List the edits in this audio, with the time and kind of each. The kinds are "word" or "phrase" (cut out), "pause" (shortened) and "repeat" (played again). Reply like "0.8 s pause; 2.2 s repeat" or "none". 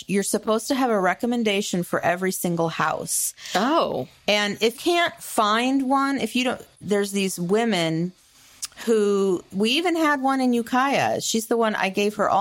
4.7 s word; 6.8 s word; 9.5 s word